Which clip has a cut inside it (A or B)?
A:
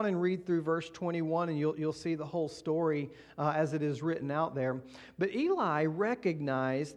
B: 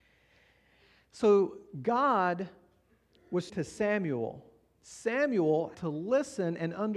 B